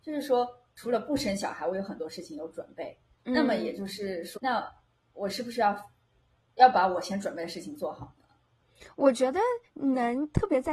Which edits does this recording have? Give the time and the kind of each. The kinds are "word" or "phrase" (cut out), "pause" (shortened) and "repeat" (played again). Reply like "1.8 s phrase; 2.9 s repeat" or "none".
4.4 s word